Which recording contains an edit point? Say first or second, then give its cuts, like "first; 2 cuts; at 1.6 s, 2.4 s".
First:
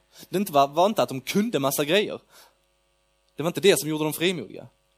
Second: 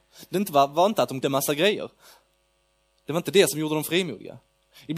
second; 1 cut; at 1.2 s